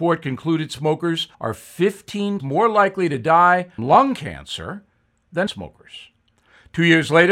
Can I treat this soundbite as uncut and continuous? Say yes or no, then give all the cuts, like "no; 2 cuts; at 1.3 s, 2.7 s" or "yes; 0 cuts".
no; 4 cuts; at 1.3 s, 2.4 s, 3.8 s, 5.5 s